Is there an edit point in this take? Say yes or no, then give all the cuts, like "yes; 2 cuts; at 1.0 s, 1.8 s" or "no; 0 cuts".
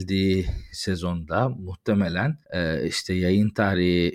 yes; 1 cut; at 2.4 s